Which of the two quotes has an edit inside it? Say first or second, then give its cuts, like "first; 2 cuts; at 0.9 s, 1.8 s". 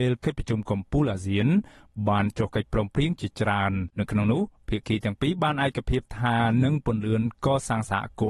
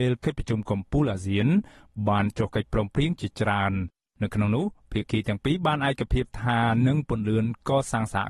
first; 1 cut; at 3.9 s